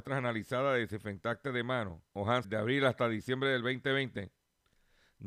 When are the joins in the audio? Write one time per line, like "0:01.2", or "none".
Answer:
0:02.1
0:02.4

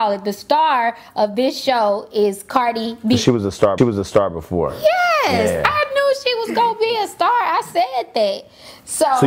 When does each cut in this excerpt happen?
0:03.8

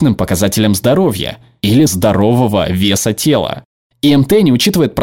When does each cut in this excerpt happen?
0:01.9

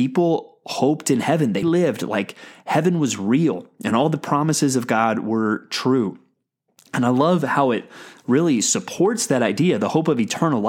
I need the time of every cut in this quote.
0:01.6

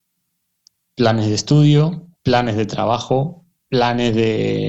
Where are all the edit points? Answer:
0:02.1

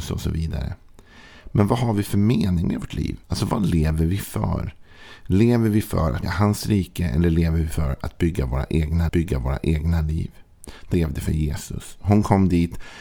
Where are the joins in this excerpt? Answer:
0:03.2
0:06.2
0:09.1
0:10.9

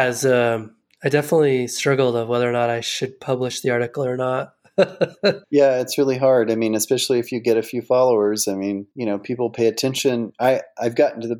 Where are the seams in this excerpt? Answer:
0:05.4
0:08.9

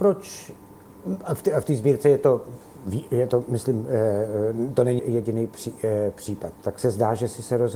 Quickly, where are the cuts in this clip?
0:05.0
0:06.5

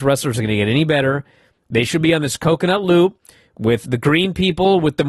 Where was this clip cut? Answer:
0:03.8

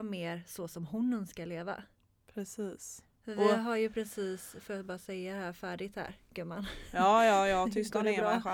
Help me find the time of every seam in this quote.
none

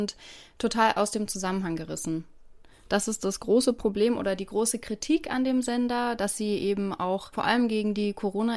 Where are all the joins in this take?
none

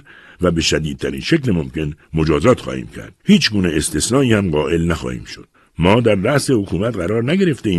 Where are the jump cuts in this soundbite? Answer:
0:02.0
0:03.2
0:05.5

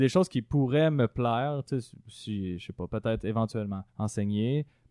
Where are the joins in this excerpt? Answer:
0:03.9

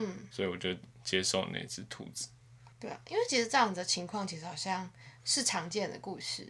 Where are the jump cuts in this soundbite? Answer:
0:02.7

